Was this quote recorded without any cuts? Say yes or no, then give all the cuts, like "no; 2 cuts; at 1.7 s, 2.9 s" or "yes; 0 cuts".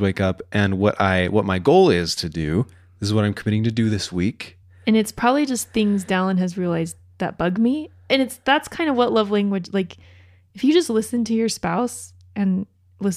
yes; 0 cuts